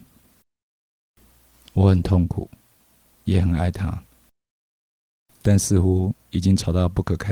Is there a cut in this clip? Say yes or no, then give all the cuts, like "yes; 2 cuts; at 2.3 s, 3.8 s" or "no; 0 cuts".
no; 0 cuts